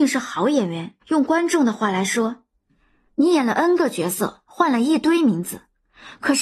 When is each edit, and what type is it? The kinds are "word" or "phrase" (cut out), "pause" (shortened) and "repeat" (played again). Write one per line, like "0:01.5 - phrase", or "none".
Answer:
0:01.0 - pause